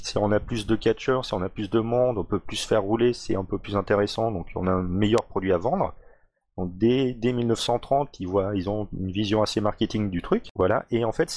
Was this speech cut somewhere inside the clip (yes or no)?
no